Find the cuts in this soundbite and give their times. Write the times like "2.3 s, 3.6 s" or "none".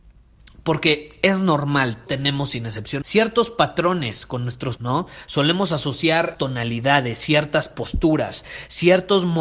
2.1 s, 3.0 s, 4.8 s, 6.3 s